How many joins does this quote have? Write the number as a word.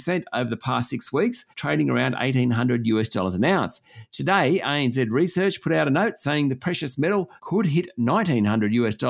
two